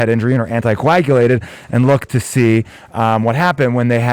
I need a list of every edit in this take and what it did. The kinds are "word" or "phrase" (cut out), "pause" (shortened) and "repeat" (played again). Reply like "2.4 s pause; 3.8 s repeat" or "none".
none